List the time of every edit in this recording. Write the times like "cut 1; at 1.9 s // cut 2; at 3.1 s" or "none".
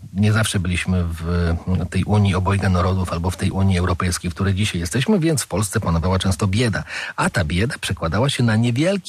none

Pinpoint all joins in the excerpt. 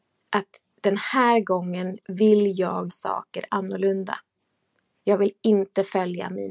cut 1; at 2.9 s

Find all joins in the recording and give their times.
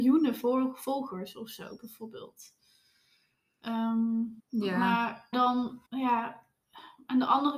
cut 1; at 4.4 s // cut 2; at 5.3 s // cut 3; at 5.9 s

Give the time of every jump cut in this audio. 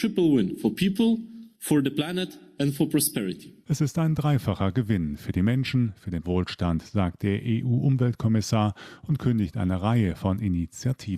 cut 1; at 1.5 s // cut 2; at 6.2 s

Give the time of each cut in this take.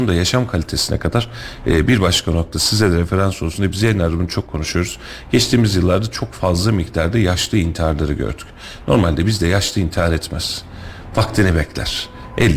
none

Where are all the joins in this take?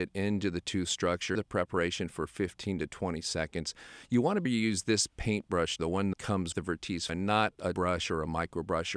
cut 1; at 1.4 s // cut 2; at 4.5 s // cut 3; at 5.8 s // cut 4; at 6.1 s // cut 5; at 6.5 s // cut 6; at 7.1 s // cut 7; at 7.7 s

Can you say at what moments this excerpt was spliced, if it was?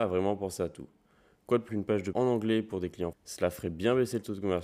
cut 1; at 1.7 s // cut 2; at 2.1 s // cut 3; at 3.1 s

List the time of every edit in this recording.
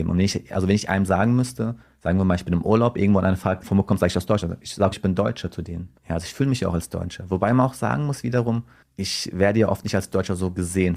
cut 1; at 1.8 s // cut 2; at 3.6 s // cut 3; at 4.9 s // cut 4; at 6.0 s

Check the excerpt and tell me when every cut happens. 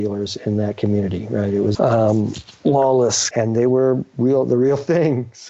cut 1; at 1.7 s // cut 2; at 3.3 s

